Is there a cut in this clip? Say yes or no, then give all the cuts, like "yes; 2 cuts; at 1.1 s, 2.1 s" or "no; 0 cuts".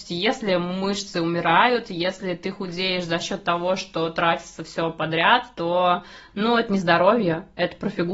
no; 0 cuts